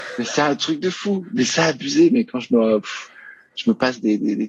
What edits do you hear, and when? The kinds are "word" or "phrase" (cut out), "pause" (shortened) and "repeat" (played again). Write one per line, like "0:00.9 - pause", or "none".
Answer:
none